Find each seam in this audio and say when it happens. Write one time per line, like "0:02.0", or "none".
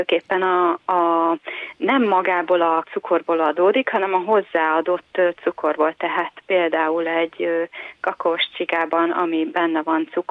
0:02.8